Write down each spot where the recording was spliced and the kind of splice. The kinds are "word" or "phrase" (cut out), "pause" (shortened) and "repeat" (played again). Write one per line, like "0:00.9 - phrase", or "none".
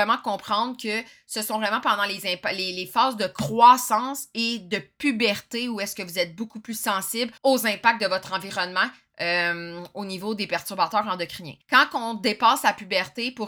0:07.4 - pause
0:11.6 - pause